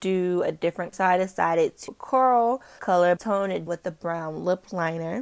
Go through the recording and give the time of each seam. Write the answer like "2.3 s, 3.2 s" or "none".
0.9 s, 1.9 s, 2.8 s, 3.2 s, 3.7 s